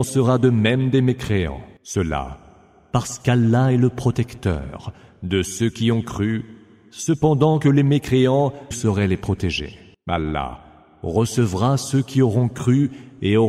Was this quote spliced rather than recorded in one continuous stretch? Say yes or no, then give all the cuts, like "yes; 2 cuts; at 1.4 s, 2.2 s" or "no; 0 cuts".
yes; 1 cut; at 8.7 s